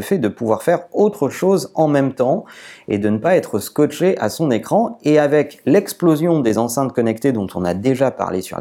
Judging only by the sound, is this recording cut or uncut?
uncut